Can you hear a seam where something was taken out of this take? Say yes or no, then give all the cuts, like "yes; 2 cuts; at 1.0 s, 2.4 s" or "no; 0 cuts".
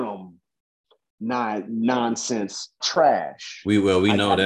yes; 1 cut; at 2.8 s